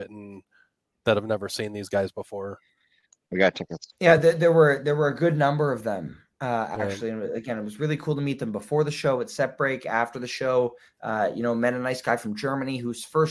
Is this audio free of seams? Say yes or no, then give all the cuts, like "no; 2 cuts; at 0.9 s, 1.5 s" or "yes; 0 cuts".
yes; 0 cuts